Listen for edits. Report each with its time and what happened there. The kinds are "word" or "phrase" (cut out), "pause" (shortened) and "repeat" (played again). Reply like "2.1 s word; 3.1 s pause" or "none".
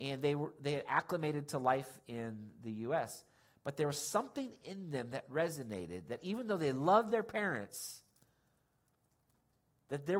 none

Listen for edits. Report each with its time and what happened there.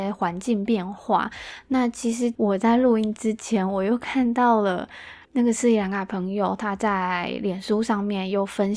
5.2 s pause

